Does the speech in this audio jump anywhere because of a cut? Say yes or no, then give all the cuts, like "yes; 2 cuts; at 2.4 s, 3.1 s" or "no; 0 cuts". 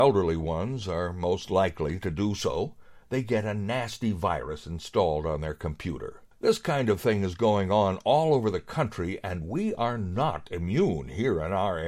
yes; 1 cut; at 6.3 s